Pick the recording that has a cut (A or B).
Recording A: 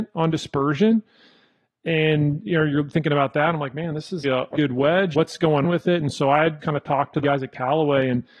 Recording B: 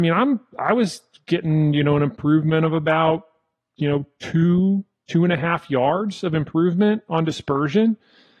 A